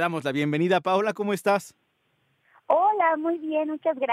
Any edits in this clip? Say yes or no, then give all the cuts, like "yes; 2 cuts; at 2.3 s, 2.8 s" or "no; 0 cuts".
no; 0 cuts